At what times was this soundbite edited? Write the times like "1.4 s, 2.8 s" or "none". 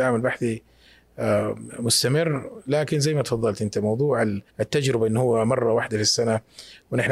4.5 s